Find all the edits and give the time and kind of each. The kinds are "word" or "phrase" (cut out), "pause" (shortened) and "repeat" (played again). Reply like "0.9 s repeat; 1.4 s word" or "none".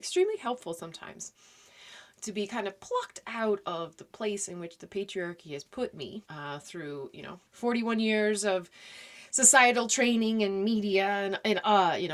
6.2 s pause; 7.5 s pause